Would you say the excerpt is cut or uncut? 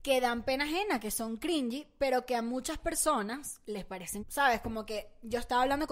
cut